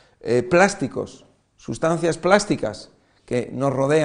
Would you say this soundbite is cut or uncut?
uncut